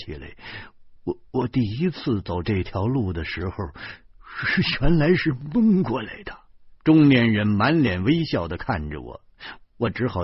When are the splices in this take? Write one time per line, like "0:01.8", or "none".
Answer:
0:01.0
0:06.8